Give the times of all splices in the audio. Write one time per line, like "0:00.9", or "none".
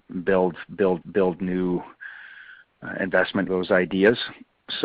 0:01.0
0:03.5

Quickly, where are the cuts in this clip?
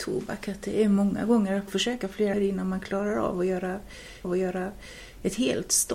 0:01.7
0:02.3
0:04.2

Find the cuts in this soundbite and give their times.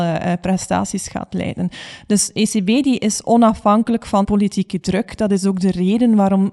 0:04.2

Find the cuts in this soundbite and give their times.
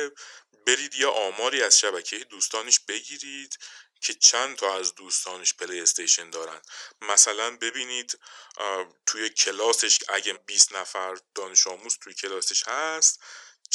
0:10.3

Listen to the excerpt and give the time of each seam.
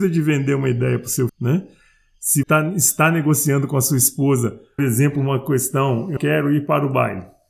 0:01.3
0:02.4
0:04.8
0:06.2

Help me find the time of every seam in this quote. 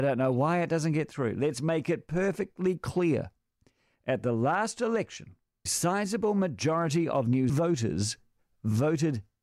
0:05.7
0:07.5

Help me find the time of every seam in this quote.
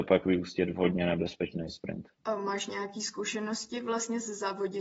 0:02.1

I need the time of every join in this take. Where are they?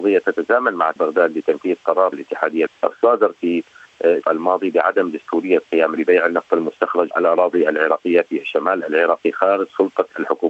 0:01.0
0:02.1
0:02.7
0:04.2
0:06.0
0:07.1

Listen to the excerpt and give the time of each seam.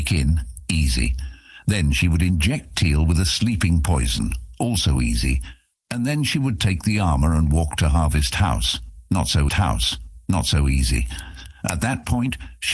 0:09.5

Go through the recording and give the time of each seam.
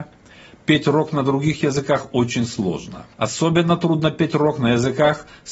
0:03.1

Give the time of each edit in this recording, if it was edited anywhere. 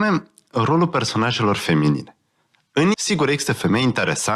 0:02.9

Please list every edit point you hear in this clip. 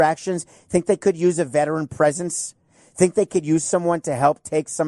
none

